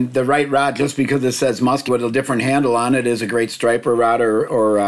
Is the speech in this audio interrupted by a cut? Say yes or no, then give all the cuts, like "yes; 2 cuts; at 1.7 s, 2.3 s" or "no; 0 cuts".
yes; 1 cut; at 1.9 s